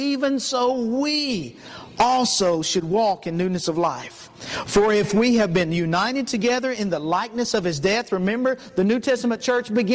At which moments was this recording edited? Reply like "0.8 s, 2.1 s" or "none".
none